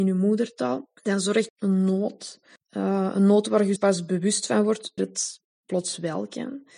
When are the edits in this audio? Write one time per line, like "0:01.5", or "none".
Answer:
0:01.0
0:01.5
0:02.6
0:03.8
0:05.0

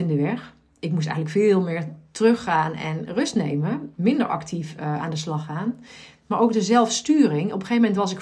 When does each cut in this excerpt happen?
none

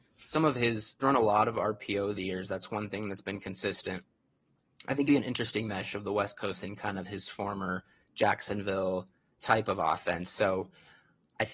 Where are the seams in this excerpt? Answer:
0:01.0
0:02.1
0:05.1
0:06.6
0:09.3

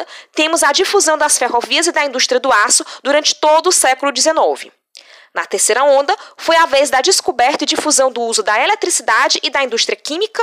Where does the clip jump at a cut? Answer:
none

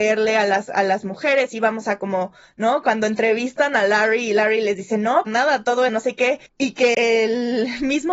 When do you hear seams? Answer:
0:05.3
0:05.9
0:06.5
0:06.9

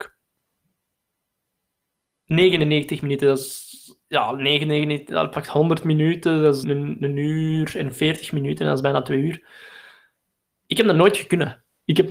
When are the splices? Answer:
0:04.0
0:06.6

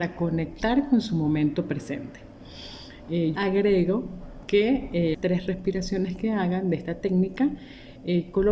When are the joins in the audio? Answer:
0:03.4
0:05.1

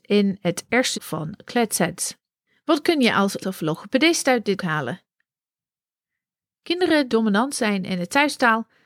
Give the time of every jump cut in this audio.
0:00.9
0:03.4
0:04.6
0:07.1

